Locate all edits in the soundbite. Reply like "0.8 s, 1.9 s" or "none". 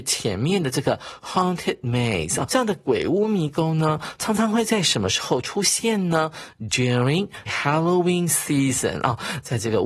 2.5 s, 7.5 s